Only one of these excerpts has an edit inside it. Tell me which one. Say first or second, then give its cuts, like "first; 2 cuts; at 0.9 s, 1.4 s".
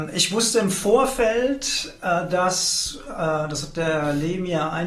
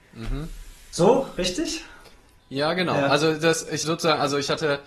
second; 1 cut; at 3.8 s